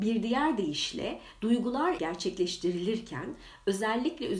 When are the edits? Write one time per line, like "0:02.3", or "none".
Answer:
0:02.0